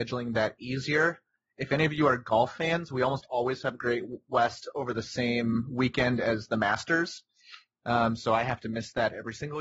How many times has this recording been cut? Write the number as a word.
zero